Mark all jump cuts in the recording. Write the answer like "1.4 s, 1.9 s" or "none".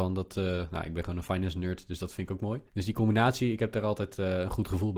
2.7 s

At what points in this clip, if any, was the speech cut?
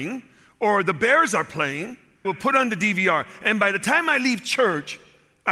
2.2 s

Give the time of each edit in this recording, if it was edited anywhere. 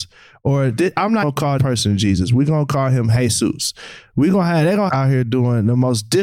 1.2 s, 1.6 s, 4.9 s

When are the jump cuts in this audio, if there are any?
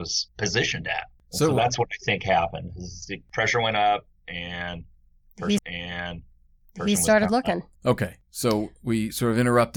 5.6 s, 7.7 s

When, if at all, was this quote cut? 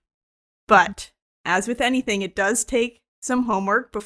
none

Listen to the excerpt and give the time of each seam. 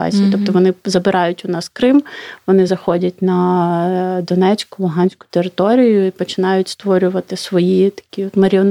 none

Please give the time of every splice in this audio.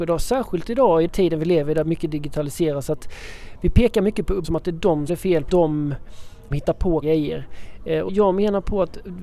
1.1 s, 4.4 s, 5.1 s, 5.5 s, 6.5 s, 7.0 s, 8.1 s

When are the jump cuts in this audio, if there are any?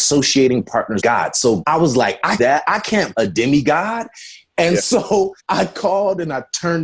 1.0 s, 1.6 s, 2.4 s, 3.1 s, 5.4 s

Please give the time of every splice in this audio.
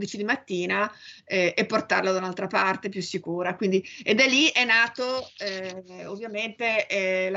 none

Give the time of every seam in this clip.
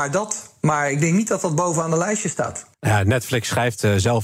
2.7 s

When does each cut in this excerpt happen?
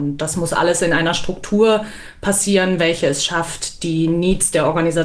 none

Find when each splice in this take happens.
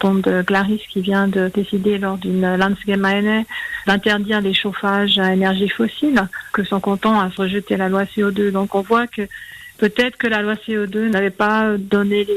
6.5 s

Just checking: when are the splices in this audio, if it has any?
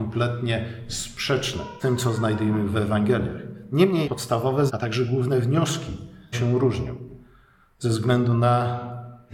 1.8 s, 4.0 s, 4.7 s, 6.3 s

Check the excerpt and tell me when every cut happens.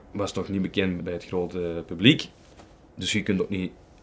1.0 s

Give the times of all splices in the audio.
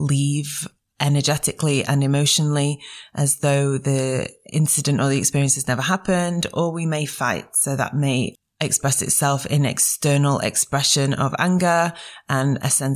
none

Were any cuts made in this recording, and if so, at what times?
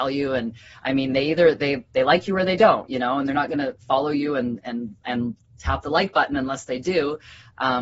none

